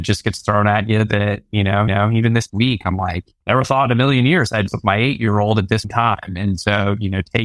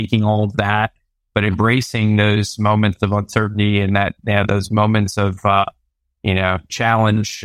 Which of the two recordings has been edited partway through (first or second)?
first